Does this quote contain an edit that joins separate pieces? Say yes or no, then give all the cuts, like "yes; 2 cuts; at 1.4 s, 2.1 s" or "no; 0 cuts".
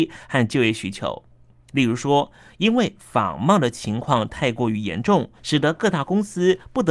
yes; 1 cut; at 5.4 s